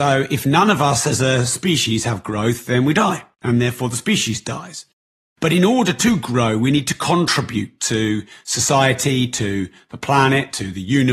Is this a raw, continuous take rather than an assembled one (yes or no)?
yes